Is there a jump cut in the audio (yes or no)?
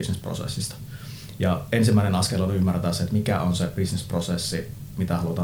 no